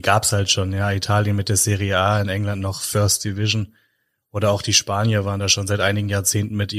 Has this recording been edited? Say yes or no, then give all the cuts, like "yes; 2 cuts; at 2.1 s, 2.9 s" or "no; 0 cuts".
no; 0 cuts